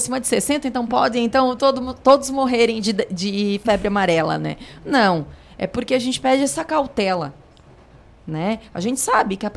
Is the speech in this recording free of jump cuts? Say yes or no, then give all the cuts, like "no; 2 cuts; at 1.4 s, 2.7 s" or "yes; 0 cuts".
yes; 0 cuts